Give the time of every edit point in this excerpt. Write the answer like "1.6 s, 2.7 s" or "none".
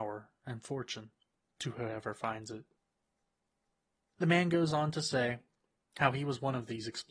none